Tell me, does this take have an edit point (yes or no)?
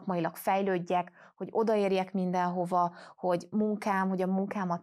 yes